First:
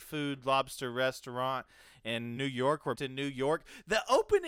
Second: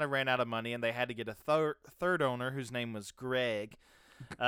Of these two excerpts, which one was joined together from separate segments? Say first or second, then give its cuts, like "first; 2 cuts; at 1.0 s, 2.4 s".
first; 2 cuts; at 2.4 s, 2.9 s